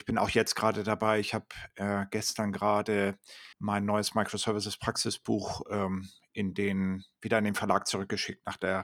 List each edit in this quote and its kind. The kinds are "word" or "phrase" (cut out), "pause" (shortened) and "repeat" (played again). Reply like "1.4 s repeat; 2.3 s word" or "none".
3.5 s pause